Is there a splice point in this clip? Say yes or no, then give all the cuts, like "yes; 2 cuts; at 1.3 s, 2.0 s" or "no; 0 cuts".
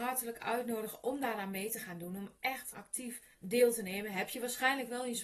yes; 2 cuts; at 2.7 s, 3.3 s